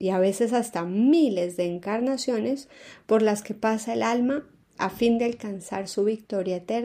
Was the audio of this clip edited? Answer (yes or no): no